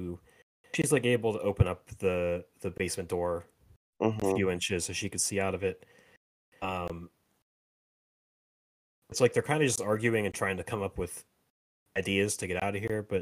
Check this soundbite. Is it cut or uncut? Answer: uncut